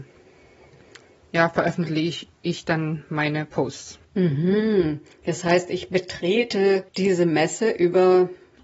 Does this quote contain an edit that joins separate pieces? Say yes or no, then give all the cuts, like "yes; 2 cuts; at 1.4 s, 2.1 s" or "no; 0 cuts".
yes; 3 cuts; at 2.3 s, 4.0 s, 6.9 s